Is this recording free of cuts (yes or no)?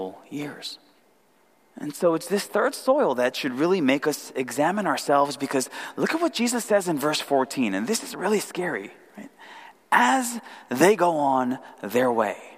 no